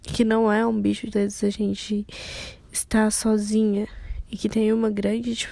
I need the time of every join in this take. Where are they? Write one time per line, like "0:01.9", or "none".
0:01.1